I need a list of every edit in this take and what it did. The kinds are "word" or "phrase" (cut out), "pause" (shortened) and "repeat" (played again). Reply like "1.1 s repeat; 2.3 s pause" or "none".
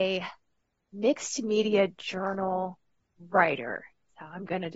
none